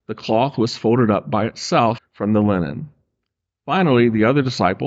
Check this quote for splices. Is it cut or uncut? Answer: cut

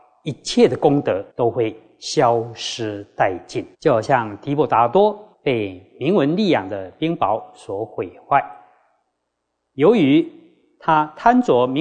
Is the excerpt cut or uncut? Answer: cut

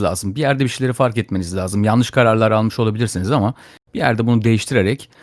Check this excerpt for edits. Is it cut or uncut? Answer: uncut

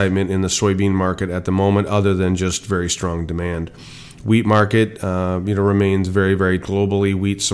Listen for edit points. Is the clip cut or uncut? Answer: cut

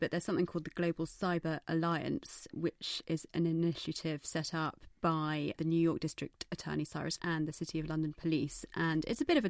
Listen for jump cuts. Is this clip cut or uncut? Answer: cut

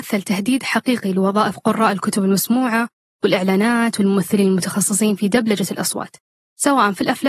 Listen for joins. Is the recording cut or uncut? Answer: uncut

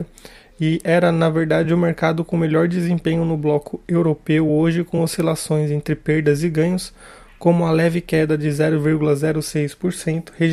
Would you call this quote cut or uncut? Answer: uncut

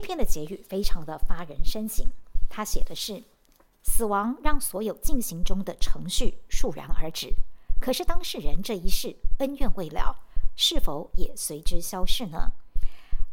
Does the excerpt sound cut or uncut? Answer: uncut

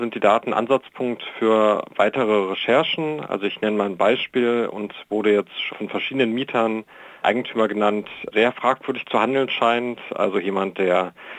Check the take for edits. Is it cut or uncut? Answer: cut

